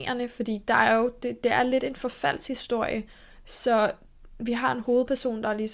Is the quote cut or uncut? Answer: uncut